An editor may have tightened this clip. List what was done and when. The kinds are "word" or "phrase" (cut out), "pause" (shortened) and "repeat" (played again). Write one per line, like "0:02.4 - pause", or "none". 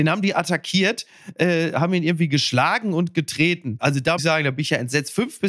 0:04.2 - word